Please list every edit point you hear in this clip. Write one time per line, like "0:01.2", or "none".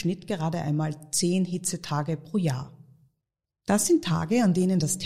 none